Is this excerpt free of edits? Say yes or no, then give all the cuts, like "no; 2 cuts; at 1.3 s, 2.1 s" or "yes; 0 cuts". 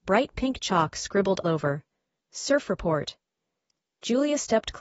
no; 1 cut; at 1.4 s